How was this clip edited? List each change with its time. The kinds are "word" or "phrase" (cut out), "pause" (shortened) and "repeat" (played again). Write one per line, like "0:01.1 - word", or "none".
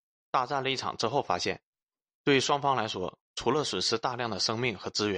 none